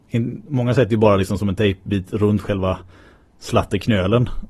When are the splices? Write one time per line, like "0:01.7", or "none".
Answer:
none

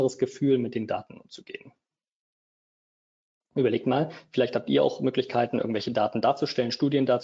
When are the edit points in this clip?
none

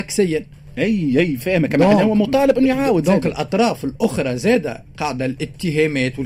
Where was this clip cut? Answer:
none

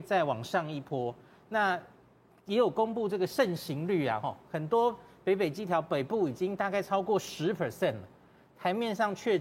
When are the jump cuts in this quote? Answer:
none

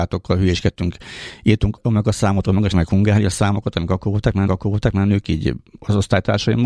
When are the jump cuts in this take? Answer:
0:02.7
0:04.5

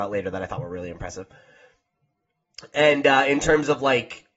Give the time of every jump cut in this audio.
none

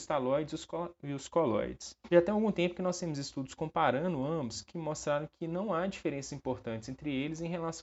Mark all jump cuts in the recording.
0:02.0

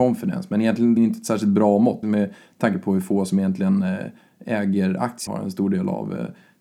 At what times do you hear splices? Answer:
0:01.0
0:02.0
0:05.3

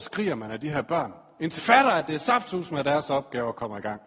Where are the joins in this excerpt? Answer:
0:01.6

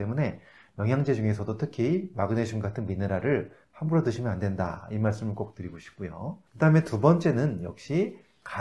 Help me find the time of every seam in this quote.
0:06.5

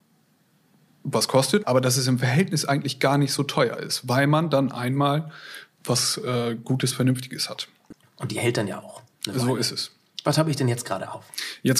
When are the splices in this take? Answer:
0:01.6
0:05.7

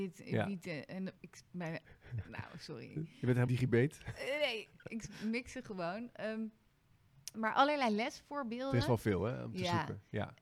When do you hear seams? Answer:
0:01.2
0:03.5
0:07.3

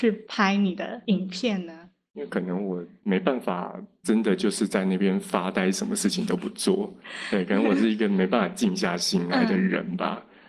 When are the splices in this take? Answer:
none

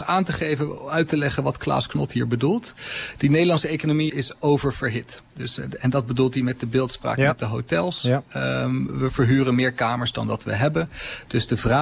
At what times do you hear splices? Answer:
0:04.1

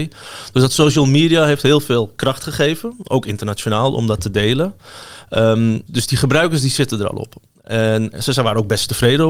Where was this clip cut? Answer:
0:05.9

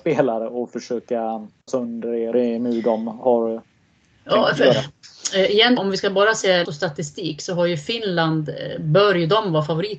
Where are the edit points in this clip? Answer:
0:01.7
0:02.3
0:05.8
0:06.6

